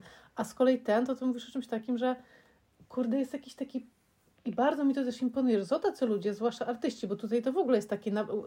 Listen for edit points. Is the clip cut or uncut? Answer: uncut